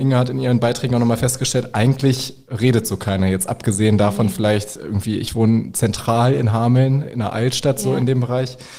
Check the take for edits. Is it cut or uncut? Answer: uncut